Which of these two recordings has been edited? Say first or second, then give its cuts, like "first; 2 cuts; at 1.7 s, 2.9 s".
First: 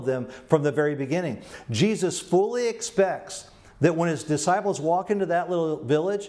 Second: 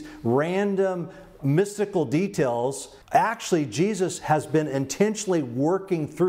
second; 3 cuts; at 1.4 s, 3.0 s, 4.2 s